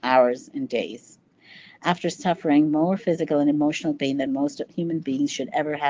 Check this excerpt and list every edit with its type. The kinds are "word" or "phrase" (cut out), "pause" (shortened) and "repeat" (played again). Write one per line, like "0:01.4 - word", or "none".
none

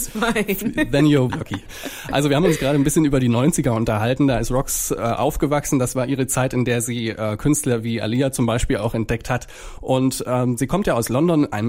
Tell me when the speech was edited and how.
0:01.3 - word

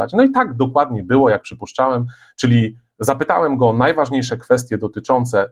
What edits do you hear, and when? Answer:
none

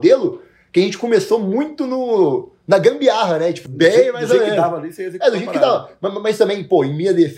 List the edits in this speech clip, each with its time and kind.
0:03.7 - phrase

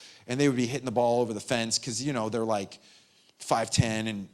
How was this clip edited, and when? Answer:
none

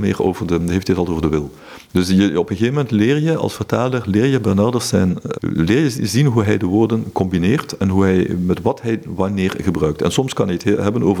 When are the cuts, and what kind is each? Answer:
0:05.3 - word

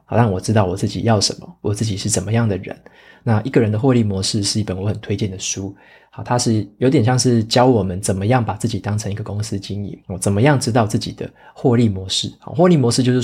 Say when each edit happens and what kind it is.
0:10.0 - pause

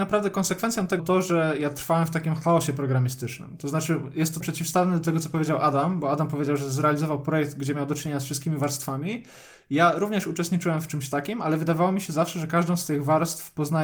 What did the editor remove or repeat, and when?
0:01.0 - word
0:04.4 - word

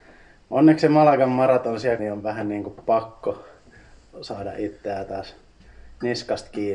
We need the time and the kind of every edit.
0:02.0 - word

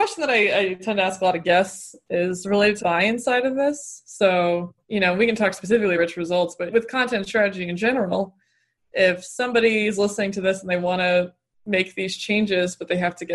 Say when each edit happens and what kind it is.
0:02.8 - word
0:04.8 - pause
0:06.0 - word

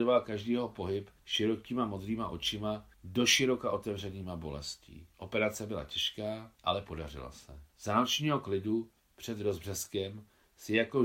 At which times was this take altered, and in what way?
0:01.2 - pause
0:02.9 - pause
0:05.1 - pause
0:06.6 - pause
0:07.7 - pause

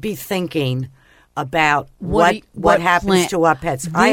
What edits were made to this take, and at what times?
none

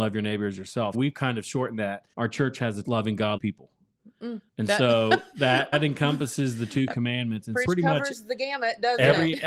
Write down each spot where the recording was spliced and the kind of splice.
0:00.9 - word
0:02.1 - pause
0:02.8 - phrase
0:03.4 - word
0:04.5 - pause
0:05.7 - word
0:07.6 - word

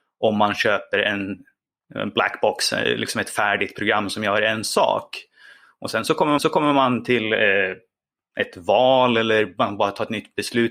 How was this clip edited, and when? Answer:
0:06.4 - repeat

